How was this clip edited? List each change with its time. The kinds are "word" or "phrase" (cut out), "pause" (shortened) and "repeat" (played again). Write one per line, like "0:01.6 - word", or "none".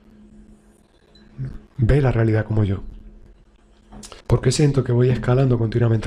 0:04.2 - pause